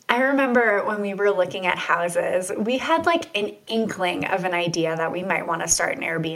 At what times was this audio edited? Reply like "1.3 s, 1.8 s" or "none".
none